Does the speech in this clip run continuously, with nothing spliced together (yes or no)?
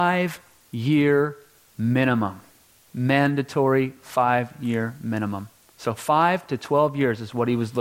yes